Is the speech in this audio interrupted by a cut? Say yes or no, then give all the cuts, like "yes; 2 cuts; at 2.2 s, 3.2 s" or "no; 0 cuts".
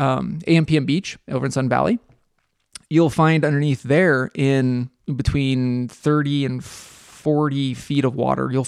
no; 0 cuts